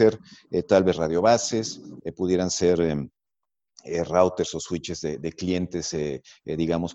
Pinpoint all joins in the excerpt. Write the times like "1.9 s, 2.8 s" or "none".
none